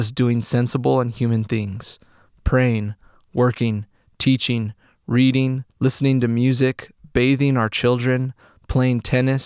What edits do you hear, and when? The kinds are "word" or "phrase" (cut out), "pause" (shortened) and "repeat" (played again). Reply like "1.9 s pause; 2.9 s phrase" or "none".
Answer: 5.7 s pause